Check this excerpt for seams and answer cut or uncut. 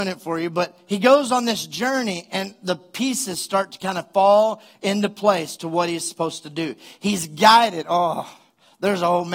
uncut